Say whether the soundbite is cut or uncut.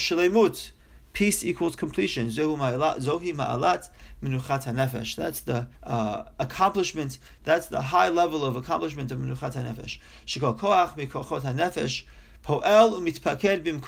cut